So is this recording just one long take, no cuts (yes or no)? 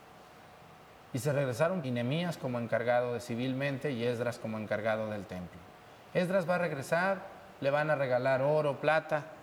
no